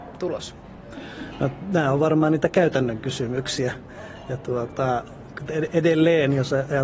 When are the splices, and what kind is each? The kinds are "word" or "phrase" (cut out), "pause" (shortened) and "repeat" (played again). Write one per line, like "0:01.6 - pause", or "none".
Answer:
0:05.4 - phrase